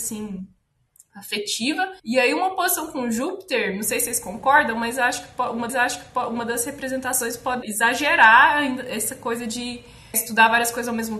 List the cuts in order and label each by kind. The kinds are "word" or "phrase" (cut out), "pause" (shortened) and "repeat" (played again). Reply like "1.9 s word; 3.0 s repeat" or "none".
2.0 s pause; 5.7 s repeat; 7.6 s word; 10.1 s word